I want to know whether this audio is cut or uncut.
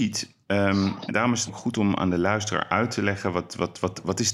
cut